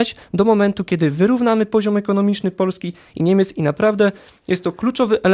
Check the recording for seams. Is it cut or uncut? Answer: uncut